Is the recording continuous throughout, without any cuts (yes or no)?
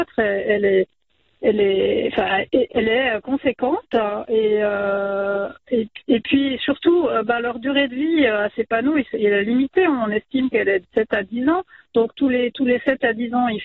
yes